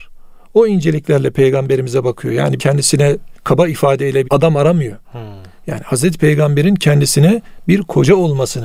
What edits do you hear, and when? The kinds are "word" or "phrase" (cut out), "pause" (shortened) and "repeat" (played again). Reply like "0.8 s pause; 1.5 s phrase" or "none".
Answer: 2.6 s phrase; 3.4 s pause; 4.2 s word; 5.0 s pause